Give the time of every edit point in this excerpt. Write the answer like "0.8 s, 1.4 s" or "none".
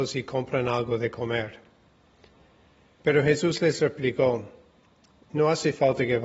none